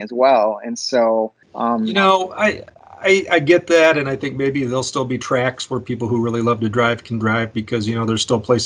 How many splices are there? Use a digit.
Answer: 1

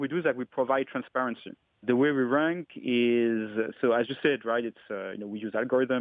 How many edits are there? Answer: 0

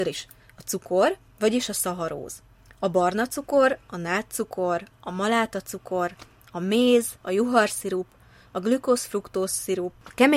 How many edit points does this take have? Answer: 3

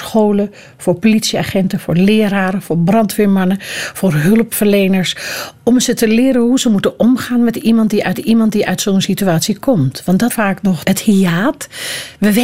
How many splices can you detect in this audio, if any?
3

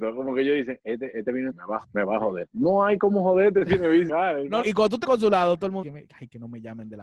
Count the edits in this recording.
8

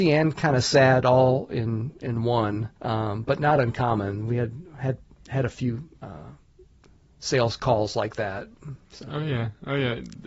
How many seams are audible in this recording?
3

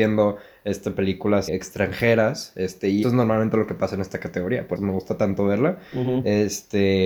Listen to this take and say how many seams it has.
3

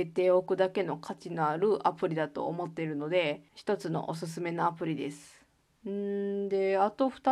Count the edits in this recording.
2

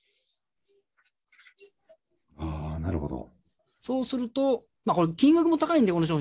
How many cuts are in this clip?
1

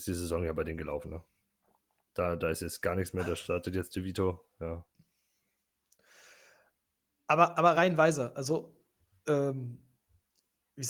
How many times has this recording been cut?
0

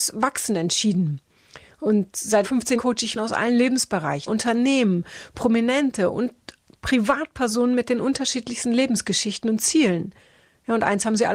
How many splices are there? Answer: 4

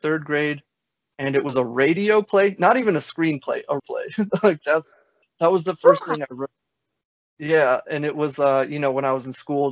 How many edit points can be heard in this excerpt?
1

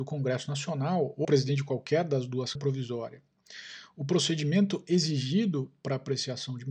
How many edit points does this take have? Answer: 2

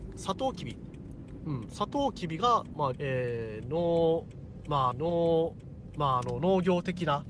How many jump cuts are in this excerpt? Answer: 2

